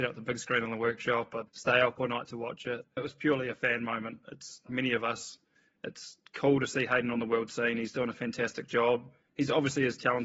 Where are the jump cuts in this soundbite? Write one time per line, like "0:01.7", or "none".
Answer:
0:01.5
0:03.0
0:04.7